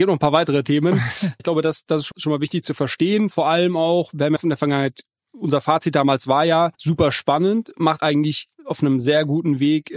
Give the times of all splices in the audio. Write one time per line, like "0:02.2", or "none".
0:01.4
0:02.1
0:04.4
0:06.7
0:08.0
0:08.5